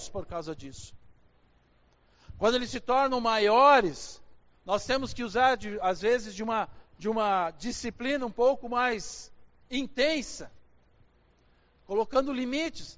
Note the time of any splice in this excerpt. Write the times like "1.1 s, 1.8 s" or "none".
none